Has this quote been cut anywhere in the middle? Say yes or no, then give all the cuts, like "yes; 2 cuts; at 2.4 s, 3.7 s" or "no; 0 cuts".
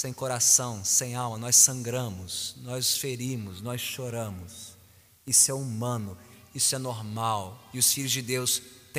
no; 0 cuts